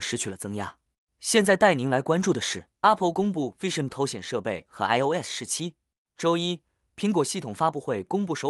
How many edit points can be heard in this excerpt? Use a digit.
2